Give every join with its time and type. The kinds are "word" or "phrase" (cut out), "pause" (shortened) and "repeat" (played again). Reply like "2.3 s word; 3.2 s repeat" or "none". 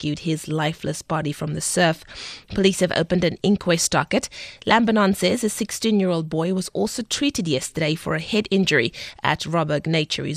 none